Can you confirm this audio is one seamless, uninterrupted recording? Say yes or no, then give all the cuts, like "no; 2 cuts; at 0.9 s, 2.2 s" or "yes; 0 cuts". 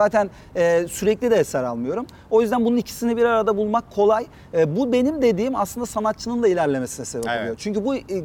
yes; 0 cuts